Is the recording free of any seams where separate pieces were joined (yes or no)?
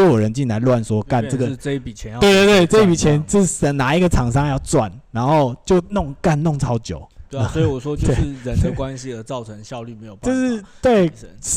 no